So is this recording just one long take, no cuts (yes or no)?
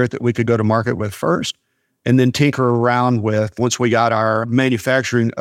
yes